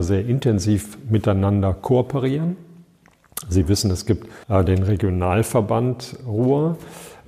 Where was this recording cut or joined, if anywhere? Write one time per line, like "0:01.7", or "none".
0:04.4